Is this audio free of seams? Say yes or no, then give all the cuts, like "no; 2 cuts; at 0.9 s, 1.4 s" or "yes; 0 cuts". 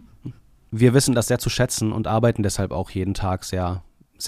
yes; 0 cuts